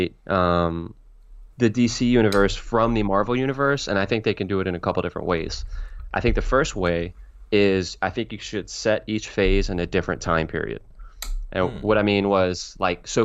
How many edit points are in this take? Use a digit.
1